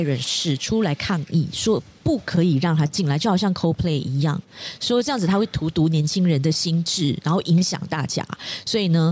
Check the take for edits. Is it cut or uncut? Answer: uncut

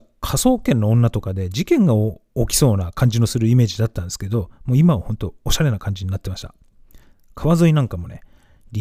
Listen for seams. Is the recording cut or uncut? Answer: cut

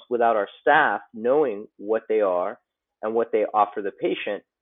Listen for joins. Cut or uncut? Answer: uncut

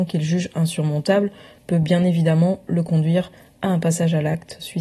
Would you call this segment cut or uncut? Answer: uncut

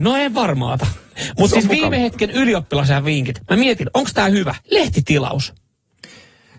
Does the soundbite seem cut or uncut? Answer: cut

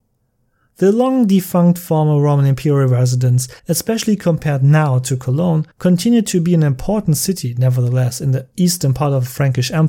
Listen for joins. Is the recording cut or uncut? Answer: cut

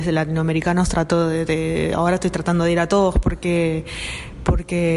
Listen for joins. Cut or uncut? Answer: uncut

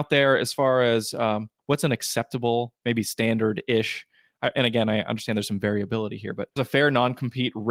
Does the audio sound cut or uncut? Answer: cut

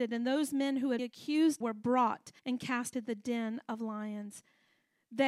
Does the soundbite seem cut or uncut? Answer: cut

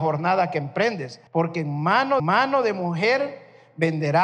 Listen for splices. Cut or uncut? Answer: cut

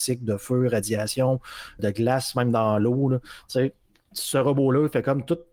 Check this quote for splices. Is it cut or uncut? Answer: cut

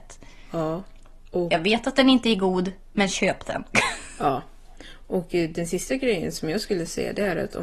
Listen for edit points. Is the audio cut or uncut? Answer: uncut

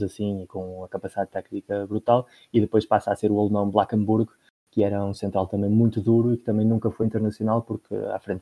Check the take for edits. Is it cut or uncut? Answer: uncut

